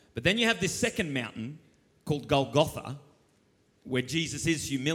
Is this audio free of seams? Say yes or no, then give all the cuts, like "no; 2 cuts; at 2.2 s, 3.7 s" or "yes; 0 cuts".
no; 1 cut; at 1.9 s